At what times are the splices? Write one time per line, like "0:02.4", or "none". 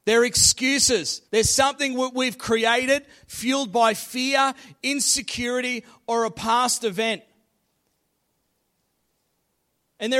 0:01.3